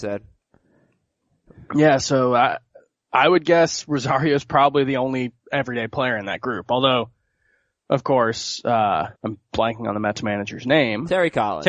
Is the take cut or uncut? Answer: cut